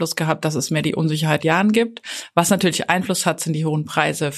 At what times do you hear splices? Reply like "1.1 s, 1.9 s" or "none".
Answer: 1.4 s